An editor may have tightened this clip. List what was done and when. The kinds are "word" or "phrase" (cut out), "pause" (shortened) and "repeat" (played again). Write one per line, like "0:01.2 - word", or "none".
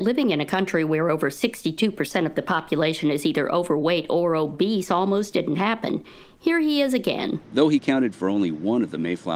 none